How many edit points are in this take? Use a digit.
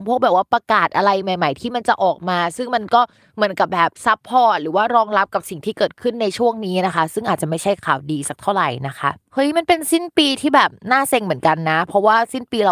1